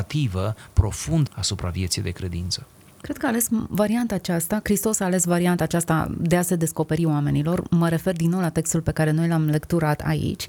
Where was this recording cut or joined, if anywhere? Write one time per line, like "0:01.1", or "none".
0:01.3